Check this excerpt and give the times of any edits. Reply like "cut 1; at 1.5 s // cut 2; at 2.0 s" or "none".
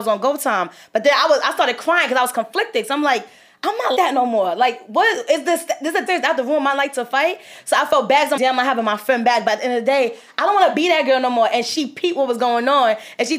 cut 1; at 4.0 s // cut 2; at 6.1 s // cut 3; at 8.4 s